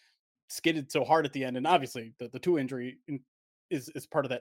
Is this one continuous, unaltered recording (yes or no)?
yes